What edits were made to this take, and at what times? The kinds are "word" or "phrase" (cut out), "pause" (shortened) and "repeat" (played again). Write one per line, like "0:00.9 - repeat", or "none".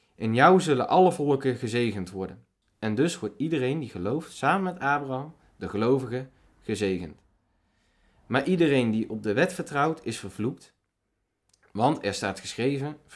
none